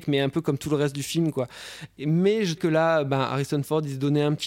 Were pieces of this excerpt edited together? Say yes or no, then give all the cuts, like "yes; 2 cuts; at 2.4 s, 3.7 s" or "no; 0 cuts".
yes; 1 cut; at 2.6 s